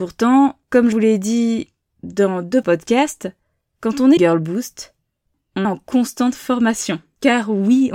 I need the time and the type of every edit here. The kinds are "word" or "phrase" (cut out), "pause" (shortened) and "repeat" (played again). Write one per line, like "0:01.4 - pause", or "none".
0:00.9 - word
0:02.6 - word
0:04.2 - word
0:05.6 - word